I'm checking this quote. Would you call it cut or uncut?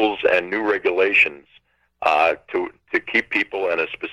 uncut